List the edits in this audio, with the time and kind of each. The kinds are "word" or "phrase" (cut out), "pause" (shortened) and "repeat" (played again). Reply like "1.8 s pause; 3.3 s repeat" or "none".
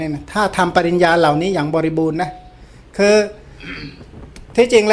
none